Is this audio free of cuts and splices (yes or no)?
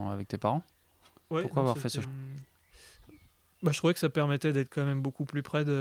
no